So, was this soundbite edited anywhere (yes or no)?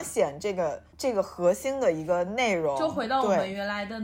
yes